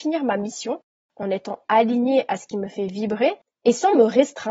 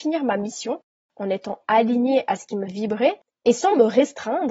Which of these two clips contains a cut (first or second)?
second